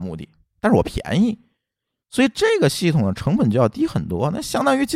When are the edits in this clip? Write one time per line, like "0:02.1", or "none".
none